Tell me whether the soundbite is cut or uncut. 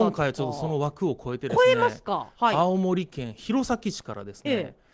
uncut